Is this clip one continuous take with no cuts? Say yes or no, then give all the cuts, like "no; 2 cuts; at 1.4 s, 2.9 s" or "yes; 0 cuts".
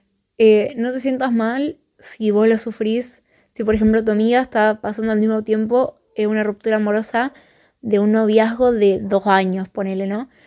yes; 0 cuts